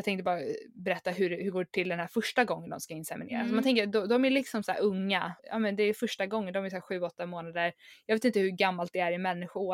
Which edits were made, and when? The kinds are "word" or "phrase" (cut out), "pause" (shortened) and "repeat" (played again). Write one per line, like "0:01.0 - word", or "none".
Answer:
0:05.4 - pause